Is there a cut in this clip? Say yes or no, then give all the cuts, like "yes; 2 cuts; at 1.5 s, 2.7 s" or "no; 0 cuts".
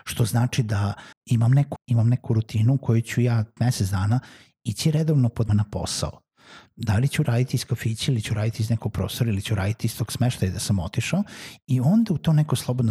yes; 5 cuts; at 1.1 s, 1.8 s, 3.6 s, 5.5 s, 8.9 s